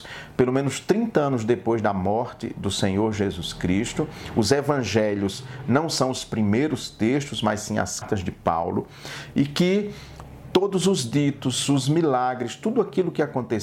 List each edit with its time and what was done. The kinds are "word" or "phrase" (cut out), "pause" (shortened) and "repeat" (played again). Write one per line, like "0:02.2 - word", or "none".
0:08.0 - word